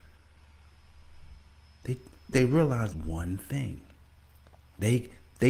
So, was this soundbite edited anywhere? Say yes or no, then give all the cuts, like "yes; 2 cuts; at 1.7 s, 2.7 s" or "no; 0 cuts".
yes; 2 cuts; at 2.3 s, 2.9 s